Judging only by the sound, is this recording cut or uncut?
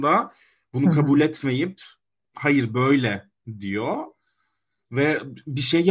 uncut